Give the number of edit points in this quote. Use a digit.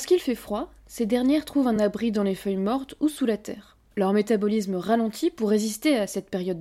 0